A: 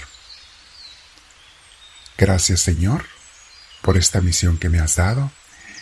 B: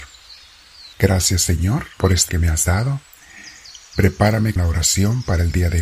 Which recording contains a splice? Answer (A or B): B